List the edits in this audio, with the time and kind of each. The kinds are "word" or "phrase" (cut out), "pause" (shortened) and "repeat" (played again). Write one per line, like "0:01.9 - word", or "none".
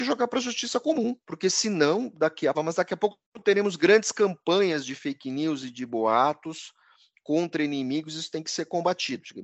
0:01.2 - pause
0:02.5 - phrase